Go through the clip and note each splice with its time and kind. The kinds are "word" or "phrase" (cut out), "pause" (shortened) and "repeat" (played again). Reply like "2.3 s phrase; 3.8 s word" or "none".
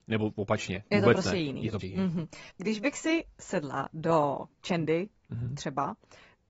1.8 s word; 2.5 s pause; 4.5 s pause